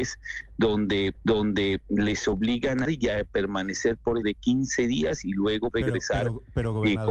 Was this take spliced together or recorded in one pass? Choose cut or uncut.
cut